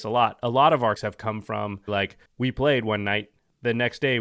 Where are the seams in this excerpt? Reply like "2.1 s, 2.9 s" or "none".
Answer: 1.0 s, 1.9 s, 2.3 s